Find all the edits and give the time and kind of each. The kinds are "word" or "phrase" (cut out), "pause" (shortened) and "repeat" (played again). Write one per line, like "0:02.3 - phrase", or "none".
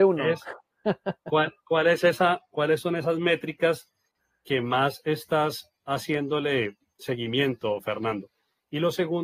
none